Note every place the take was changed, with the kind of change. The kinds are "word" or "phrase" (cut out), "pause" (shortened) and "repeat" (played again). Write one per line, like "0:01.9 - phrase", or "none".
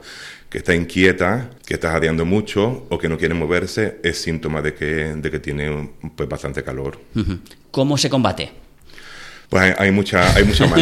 0:01.6 - pause
0:09.5 - pause